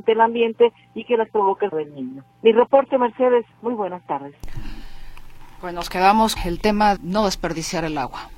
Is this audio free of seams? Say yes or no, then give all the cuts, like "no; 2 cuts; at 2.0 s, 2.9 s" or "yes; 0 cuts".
no; 5 cuts; at 1.7 s, 2.3 s, 3.5 s, 6.4 s, 7.0 s